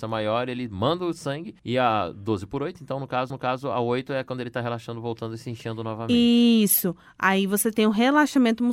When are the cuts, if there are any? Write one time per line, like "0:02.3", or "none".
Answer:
0:01.6
0:03.3